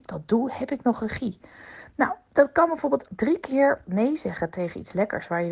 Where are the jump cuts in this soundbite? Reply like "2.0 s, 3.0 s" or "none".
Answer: 3.1 s, 3.8 s